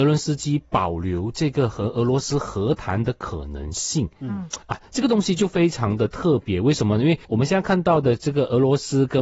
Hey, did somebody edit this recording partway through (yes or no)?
yes